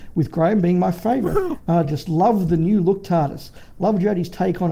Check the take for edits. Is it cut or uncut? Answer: uncut